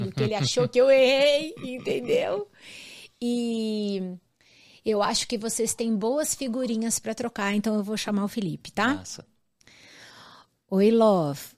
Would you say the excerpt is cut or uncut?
uncut